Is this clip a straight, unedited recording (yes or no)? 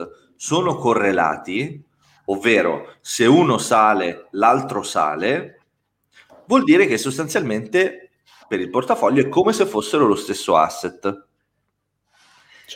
yes